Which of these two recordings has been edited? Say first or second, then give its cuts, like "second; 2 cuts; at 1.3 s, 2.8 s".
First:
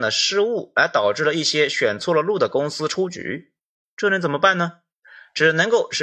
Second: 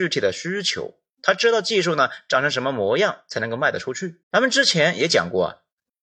second; 1 cut; at 4.2 s